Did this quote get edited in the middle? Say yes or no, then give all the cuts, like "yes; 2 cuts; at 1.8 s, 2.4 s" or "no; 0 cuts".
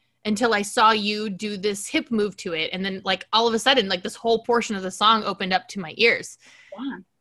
no; 0 cuts